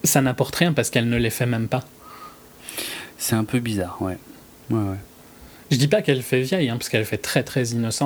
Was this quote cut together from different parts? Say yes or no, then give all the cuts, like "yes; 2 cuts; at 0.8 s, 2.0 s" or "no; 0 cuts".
no; 0 cuts